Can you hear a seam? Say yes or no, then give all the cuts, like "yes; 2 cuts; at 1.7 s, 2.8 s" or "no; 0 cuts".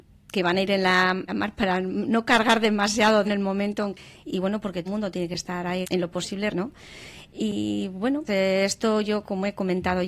yes; 7 cuts; at 1.3 s, 3.2 s, 4.2 s, 4.9 s, 5.8 s, 6.5 s, 8.3 s